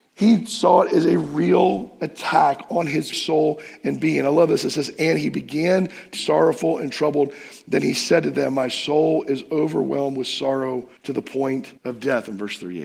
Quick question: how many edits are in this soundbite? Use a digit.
4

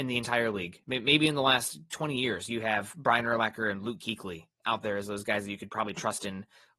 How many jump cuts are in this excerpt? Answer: 0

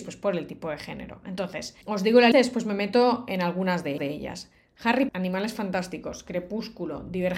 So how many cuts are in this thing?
4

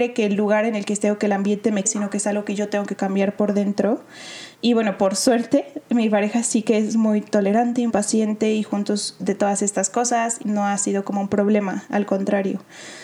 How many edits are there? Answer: 5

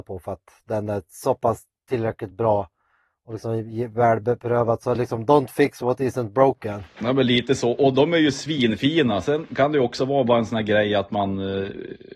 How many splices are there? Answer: 0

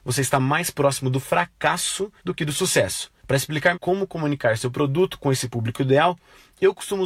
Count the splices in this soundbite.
3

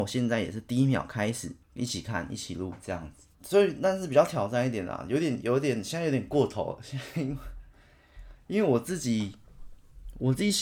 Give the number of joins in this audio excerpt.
2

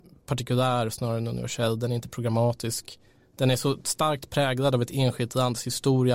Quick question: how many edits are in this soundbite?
0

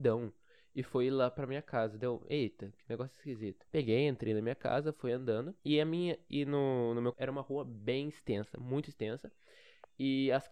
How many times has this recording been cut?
3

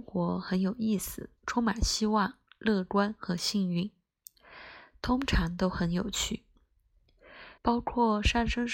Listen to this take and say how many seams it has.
2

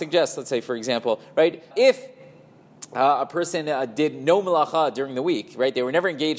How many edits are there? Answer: 1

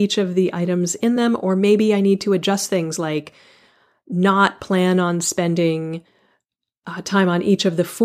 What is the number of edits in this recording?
0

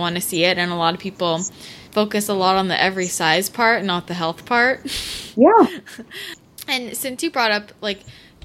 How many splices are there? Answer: 1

